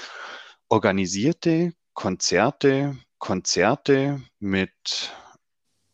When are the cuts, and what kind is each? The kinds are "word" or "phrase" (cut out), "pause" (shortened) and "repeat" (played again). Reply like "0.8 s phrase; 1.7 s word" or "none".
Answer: 3.1 s repeat